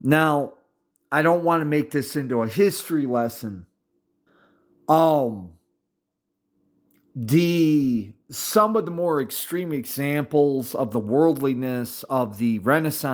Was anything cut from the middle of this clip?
yes; 1 cut; at 4.3 s

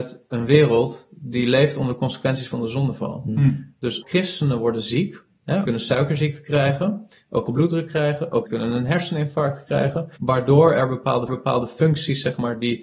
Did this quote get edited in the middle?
yes; 6 cuts; at 4.0 s, 5.6 s, 7.5 s, 8.5 s, 10.2 s, 11.3 s

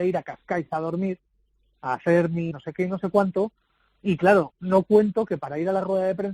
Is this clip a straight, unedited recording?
no; 1 cut; at 2.5 s

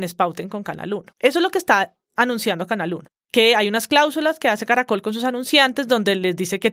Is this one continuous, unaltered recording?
no; 1 cut; at 1.1 s

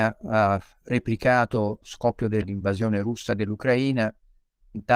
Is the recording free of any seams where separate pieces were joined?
no; 2 cuts; at 1.8 s, 2.4 s

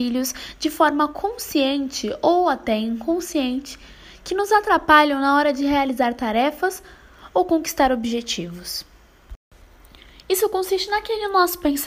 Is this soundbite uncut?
yes; 0 cuts

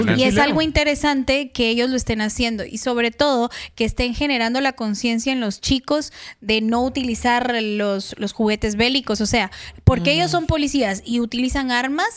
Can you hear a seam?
no; 0 cuts

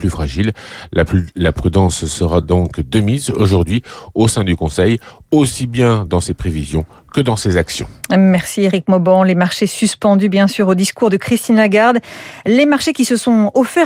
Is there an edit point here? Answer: no; 0 cuts

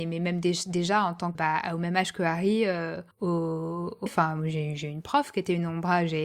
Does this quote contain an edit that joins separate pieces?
yes; 3 cuts; at 1.3 s, 3.1 s, 4.1 s

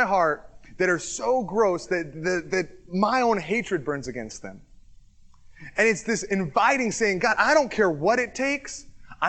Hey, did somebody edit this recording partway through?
no; 0 cuts

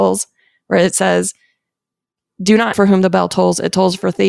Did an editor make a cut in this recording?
yes; 1 cut; at 2.7 s

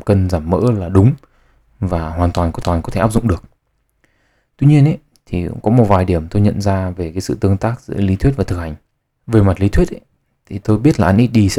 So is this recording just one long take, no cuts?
no; 2 cuts; at 2.6 s, 9.0 s

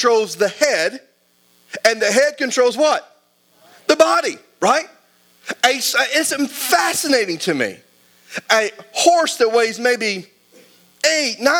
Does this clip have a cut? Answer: no; 0 cuts

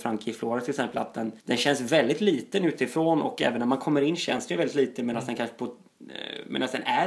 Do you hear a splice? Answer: yes; 1 cut; at 1.4 s

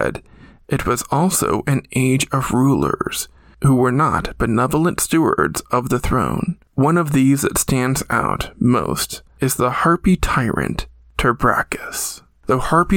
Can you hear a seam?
no; 0 cuts

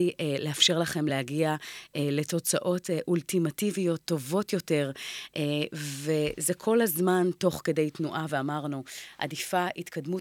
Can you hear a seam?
no; 0 cuts

